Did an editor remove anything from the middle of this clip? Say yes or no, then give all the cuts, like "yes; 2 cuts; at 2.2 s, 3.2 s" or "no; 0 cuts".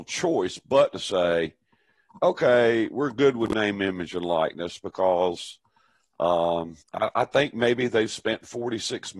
yes; 1 cut; at 6.8 s